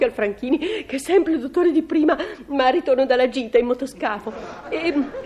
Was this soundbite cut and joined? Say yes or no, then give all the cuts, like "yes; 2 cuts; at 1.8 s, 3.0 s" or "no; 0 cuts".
no; 0 cuts